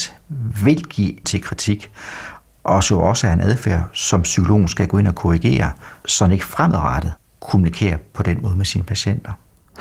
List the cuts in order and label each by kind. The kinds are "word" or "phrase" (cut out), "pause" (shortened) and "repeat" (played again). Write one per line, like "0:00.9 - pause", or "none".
0:01.2 - word